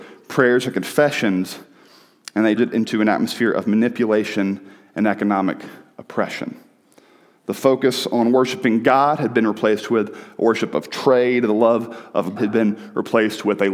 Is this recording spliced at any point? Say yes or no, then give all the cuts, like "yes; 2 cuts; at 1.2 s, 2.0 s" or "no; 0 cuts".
yes; 2 cuts; at 2.6 s, 12.4 s